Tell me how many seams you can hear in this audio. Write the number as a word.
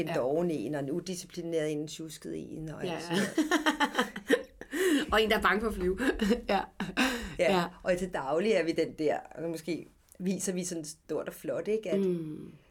zero